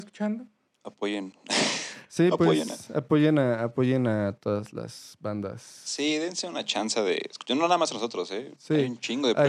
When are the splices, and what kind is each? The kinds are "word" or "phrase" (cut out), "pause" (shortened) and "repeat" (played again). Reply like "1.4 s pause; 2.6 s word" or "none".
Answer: none